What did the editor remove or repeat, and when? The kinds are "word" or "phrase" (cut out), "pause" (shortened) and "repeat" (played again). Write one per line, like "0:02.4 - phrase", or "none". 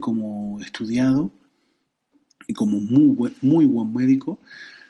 none